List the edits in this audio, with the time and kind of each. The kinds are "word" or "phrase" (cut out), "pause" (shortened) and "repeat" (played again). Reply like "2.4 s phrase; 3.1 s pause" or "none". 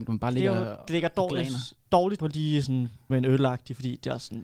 2.2 s word; 3.1 s phrase